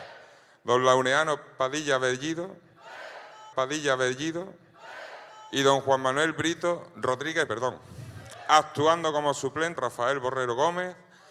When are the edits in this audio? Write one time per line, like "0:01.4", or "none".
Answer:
0:03.5
0:07.5
0:09.8